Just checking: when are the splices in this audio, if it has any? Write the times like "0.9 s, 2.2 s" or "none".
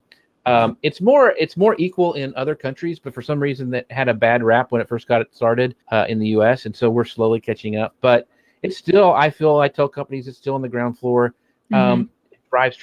5.8 s